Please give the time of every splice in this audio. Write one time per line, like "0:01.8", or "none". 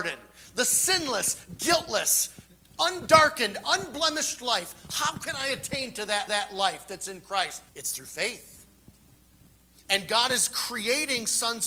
0:06.3
0:07.7